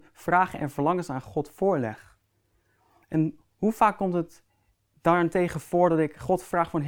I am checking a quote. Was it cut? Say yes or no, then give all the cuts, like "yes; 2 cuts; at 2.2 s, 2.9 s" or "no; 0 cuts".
no; 0 cuts